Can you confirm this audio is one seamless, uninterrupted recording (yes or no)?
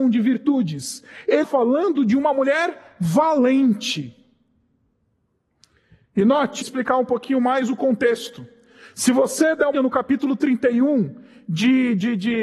no